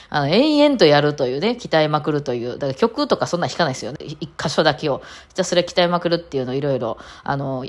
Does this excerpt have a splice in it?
yes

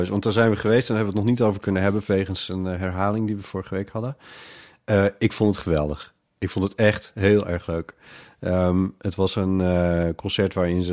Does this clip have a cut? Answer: no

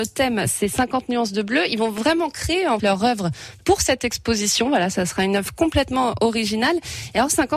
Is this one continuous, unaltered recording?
no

